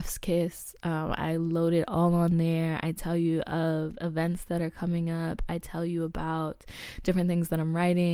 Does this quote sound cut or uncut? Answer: uncut